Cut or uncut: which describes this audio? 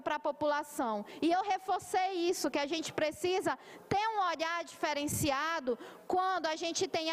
uncut